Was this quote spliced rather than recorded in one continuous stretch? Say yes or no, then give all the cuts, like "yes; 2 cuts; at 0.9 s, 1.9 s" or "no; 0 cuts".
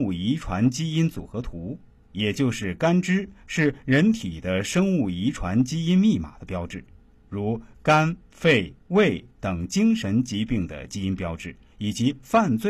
no; 0 cuts